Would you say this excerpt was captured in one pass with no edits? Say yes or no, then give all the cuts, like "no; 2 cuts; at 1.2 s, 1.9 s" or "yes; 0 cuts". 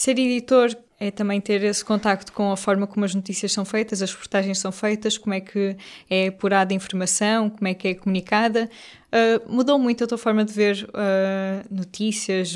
yes; 0 cuts